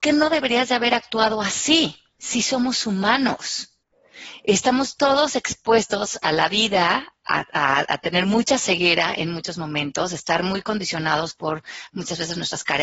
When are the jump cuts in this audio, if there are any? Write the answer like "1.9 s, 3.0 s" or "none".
none